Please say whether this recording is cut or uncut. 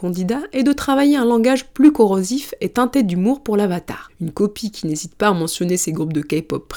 uncut